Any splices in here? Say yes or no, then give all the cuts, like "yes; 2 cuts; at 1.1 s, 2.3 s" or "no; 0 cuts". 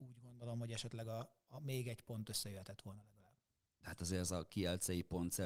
no; 0 cuts